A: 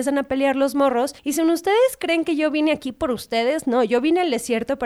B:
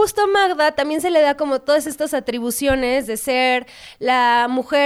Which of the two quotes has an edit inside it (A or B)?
A